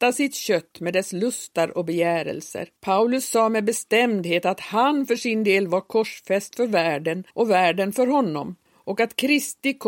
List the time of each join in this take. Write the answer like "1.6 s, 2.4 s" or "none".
2.8 s, 7.3 s, 8.7 s